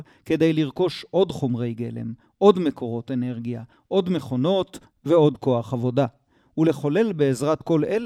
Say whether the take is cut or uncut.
uncut